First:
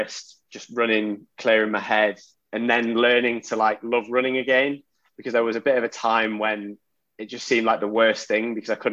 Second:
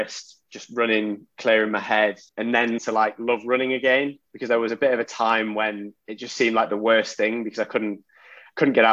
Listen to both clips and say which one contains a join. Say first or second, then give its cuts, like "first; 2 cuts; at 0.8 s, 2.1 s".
second; 4 cuts; at 2.3 s, 2.8 s, 4.3 s, 6.0 s